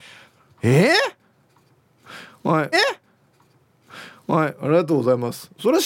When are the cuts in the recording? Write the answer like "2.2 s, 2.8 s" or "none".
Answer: 2.7 s